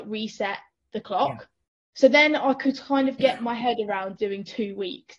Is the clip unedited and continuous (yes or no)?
no